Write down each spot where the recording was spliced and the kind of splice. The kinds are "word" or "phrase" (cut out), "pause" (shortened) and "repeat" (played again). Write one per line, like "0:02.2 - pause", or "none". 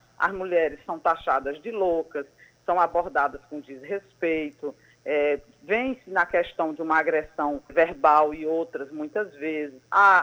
0:07.7 - word